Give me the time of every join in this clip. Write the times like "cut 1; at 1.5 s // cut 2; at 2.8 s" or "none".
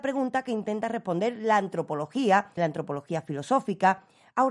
cut 1; at 2.6 s